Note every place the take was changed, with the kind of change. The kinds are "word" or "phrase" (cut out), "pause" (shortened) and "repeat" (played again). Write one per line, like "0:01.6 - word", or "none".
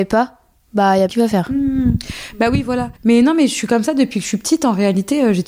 0:01.1 - word
0:03.0 - pause